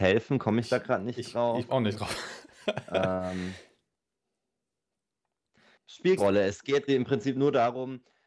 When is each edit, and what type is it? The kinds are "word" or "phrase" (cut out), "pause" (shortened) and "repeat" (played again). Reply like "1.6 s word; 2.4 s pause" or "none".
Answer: 1.7 s word; 6.2 s word; 6.9 s word